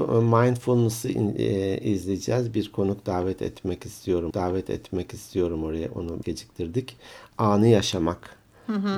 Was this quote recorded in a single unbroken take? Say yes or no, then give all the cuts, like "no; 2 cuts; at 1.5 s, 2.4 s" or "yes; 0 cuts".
no; 2 cuts; at 4.3 s, 6.2 s